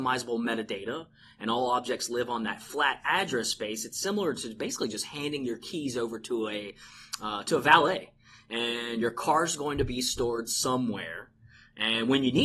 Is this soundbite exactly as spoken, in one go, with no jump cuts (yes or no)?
yes